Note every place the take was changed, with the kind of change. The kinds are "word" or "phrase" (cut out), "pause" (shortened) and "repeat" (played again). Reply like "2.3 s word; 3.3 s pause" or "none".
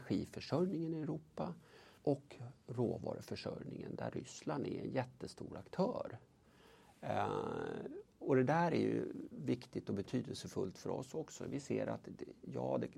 2.0 s pause